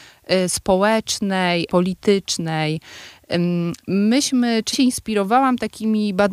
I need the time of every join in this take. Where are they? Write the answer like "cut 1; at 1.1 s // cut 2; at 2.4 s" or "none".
cut 1; at 1.7 s // cut 2; at 4.7 s

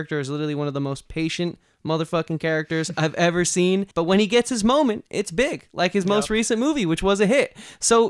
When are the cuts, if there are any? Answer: cut 1; at 3.9 s

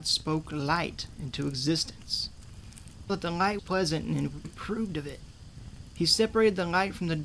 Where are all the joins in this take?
cut 1; at 3.1 s // cut 2; at 3.6 s // cut 3; at 4.4 s

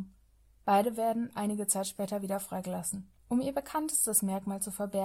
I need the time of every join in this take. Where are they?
cut 1; at 3.2 s

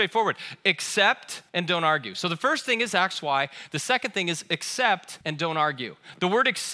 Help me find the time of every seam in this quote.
cut 1; at 1.5 s // cut 2; at 5.2 s

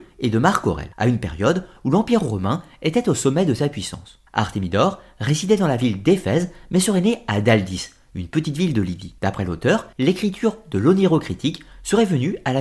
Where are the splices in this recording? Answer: cut 1; at 0.9 s // cut 2; at 4.3 s // cut 3; at 9.2 s // cut 4; at 9.9 s

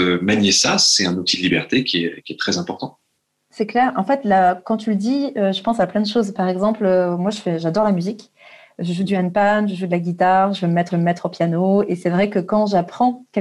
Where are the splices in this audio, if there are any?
cut 1; at 10.9 s

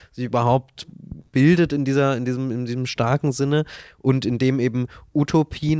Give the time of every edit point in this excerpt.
none

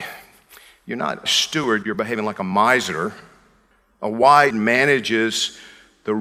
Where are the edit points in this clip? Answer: cut 1; at 1.3 s // cut 2; at 1.8 s // cut 3; at 4.5 s

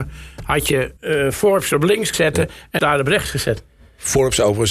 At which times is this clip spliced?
cut 1; at 1.0 s // cut 2; at 2.1 s // cut 3; at 2.8 s

